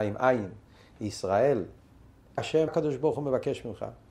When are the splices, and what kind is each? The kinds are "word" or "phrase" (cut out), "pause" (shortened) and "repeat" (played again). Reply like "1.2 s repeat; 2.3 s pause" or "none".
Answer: 2.4 s word; 2.7 s word